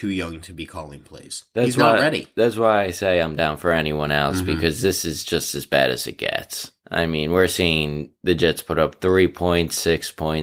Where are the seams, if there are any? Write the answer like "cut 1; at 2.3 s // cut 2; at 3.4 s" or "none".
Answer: cut 1; at 6.8 s

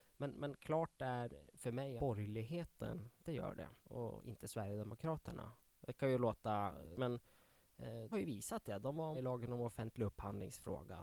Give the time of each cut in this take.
cut 1; at 2.0 s // cut 2; at 3.2 s // cut 3; at 3.8 s // cut 4; at 6.9 s // cut 5; at 8.1 s // cut 6; at 9.1 s

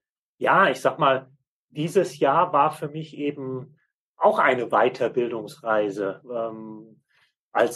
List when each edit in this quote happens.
none

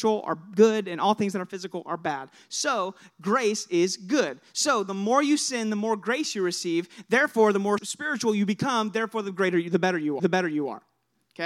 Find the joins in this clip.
cut 1; at 7.8 s // cut 2; at 10.2 s

